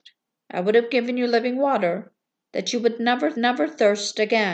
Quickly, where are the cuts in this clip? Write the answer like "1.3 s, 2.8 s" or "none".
3.3 s